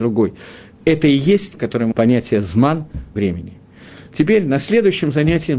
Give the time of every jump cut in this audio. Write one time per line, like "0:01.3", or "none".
0:01.6
0:01.9
0:03.2